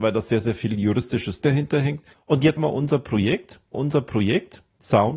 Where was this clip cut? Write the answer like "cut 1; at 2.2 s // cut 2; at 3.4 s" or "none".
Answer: cut 1; at 1.4 s // cut 2; at 2.1 s // cut 3; at 2.6 s // cut 4; at 3.7 s